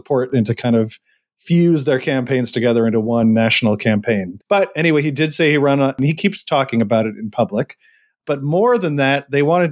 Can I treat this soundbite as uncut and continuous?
yes; 0 cuts

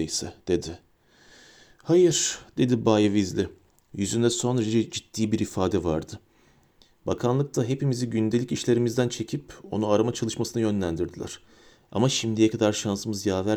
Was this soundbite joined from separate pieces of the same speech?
no; 0 cuts

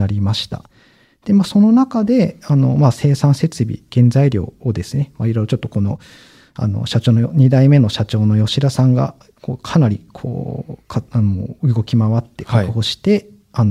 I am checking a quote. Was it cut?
no; 0 cuts

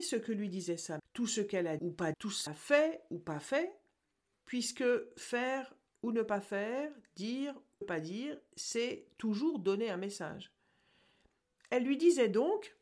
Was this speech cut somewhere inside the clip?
yes; 5 cuts; at 1.0 s, 1.8 s, 2.1 s, 2.5 s, 7.8 s

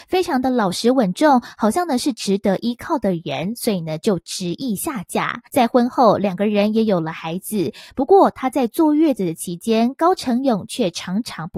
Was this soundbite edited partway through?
yes; 1 cut; at 5.5 s

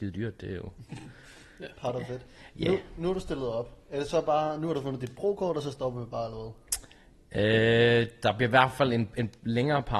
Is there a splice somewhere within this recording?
no; 0 cuts

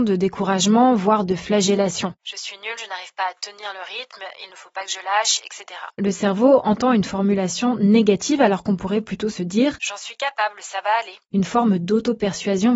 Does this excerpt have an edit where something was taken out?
no; 0 cuts

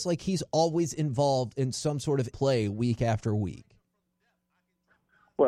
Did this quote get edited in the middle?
yes; 1 cut; at 2.3 s

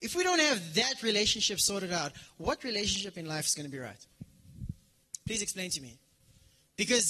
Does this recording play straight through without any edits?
yes; 0 cuts

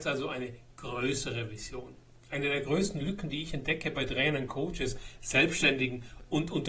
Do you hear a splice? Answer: no; 0 cuts

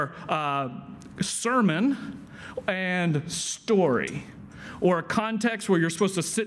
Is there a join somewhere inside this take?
no; 0 cuts

